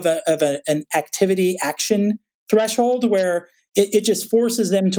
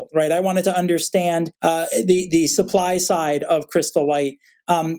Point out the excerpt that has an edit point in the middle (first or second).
second